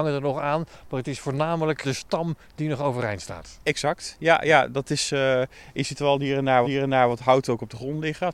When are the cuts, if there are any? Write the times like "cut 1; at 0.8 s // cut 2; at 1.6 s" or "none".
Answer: cut 1; at 1.8 s // cut 2; at 6.6 s